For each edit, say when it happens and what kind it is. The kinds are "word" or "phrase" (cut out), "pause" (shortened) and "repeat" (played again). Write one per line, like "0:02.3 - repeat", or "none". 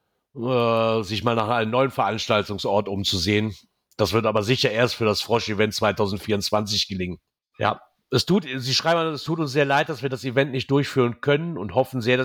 0:07.4 - pause